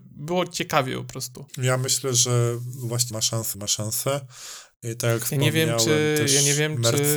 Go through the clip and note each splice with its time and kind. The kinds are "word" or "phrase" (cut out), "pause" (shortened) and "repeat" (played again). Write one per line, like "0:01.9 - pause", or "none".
0:01.5 - pause
0:03.1 - word
0:03.5 - word